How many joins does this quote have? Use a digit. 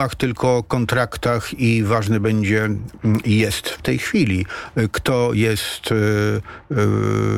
0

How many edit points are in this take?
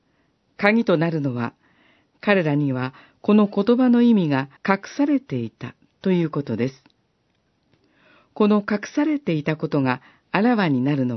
1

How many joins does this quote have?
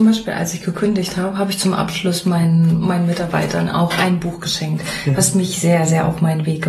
0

